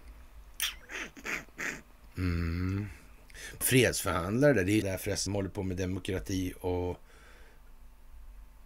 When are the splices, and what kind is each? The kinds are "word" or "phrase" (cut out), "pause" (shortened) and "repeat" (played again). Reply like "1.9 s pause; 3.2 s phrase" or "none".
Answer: 3.6 s word; 4.8 s phrase; 5.3 s word